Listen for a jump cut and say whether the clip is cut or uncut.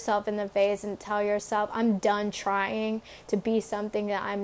uncut